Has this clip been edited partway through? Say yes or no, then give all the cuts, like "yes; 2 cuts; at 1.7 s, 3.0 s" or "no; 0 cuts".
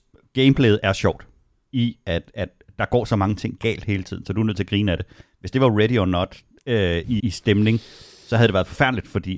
yes; 1 cut; at 7.2 s